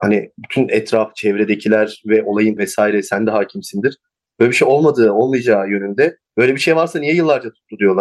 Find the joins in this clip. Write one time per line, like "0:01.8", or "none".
0:02.6